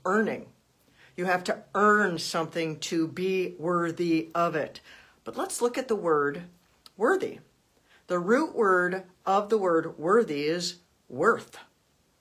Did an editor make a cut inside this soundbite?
no; 0 cuts

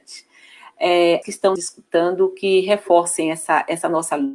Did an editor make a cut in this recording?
yes; 2 cuts; at 1.2 s, 1.6 s

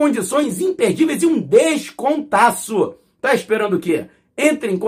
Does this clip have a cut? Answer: no; 0 cuts

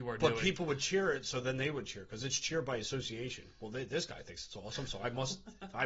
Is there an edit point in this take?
no; 0 cuts

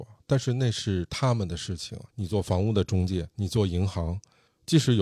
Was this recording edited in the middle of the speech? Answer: yes; 2 cuts; at 2.1 s, 3.3 s

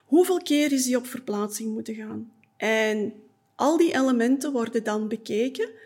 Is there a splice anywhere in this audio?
no; 0 cuts

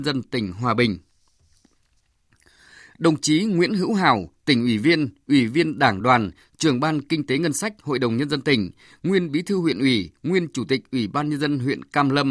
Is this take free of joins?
yes; 0 cuts

